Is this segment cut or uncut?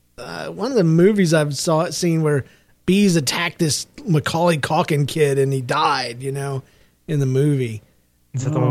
uncut